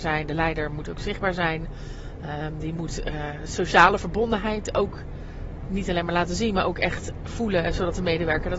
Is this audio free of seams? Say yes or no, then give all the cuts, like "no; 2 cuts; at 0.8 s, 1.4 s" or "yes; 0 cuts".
yes; 0 cuts